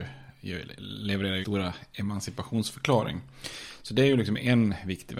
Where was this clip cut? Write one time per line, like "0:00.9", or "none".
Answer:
0:01.4

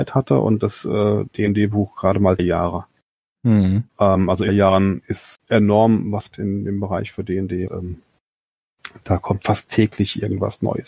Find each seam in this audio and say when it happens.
0:02.4
0:03.9
0:04.5
0:05.4
0:06.3
0:07.7
0:09.4

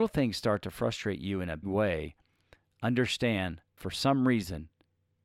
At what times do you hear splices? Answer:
0:01.6
0:03.8

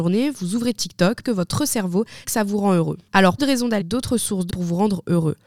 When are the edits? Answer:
0:01.2
0:02.2
0:03.4
0:03.8
0:04.5

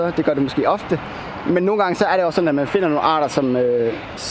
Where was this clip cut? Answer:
none

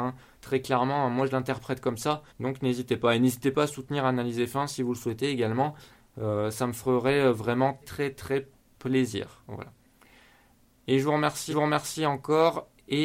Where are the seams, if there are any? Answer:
0:02.3
0:07.8
0:11.5

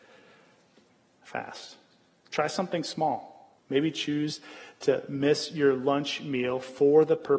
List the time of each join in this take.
0:03.6

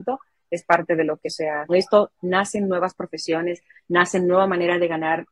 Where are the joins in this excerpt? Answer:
0:01.2
0:01.7
0:02.2

